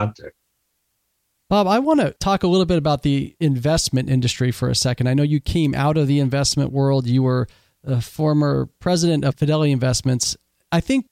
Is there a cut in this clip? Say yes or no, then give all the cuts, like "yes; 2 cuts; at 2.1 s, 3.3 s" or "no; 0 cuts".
no; 0 cuts